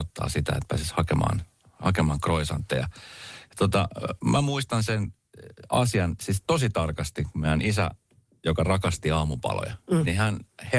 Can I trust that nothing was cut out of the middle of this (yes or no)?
yes